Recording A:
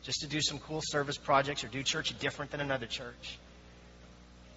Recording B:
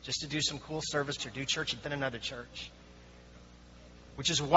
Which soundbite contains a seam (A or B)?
B